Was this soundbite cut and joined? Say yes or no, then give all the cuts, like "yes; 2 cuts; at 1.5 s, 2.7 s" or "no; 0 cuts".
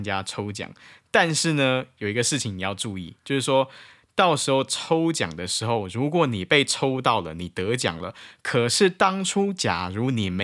no; 0 cuts